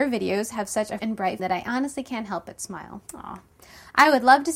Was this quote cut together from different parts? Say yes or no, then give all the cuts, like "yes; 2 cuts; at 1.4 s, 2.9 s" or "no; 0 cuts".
yes; 3 cuts; at 1.0 s, 1.4 s, 3.0 s